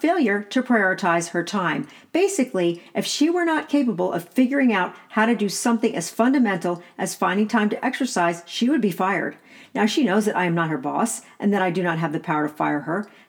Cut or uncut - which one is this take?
uncut